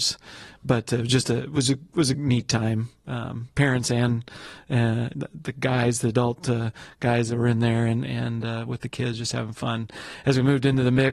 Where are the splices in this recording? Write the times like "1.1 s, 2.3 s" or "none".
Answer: 3.5 s